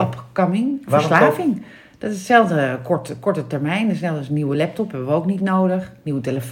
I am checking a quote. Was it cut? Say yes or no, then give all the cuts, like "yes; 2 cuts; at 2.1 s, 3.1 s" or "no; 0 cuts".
no; 0 cuts